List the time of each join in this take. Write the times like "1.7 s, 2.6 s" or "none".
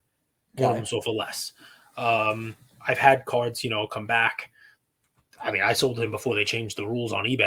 none